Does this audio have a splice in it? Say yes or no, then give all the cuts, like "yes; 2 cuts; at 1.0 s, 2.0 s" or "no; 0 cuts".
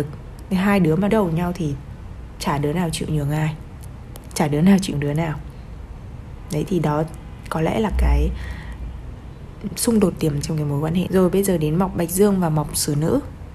yes; 4 cuts; at 1.1 s, 4.9 s, 10.4 s, 11.1 s